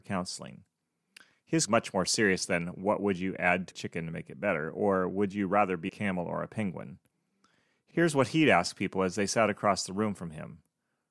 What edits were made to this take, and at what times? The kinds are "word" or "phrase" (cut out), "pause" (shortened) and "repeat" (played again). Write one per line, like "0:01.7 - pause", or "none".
0:01.7 - phrase
0:03.7 - word
0:05.9 - word